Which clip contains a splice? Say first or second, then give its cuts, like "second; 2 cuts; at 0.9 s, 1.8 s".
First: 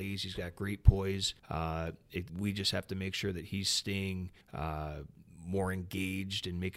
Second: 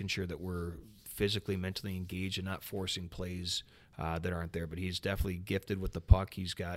first; 3 cuts; at 1.4 s, 2.3 s, 4.4 s